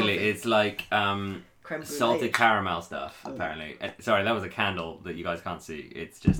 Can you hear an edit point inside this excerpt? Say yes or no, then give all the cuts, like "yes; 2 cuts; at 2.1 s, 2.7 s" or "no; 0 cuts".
no; 0 cuts